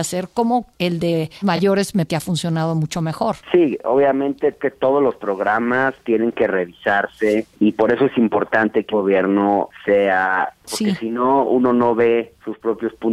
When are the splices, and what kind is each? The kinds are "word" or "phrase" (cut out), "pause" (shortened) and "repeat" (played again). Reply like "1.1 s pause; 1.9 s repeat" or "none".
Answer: 1.4 s word; 2.1 s word; 3.4 s pause; 4.6 s word; 8.9 s word; 10.6 s word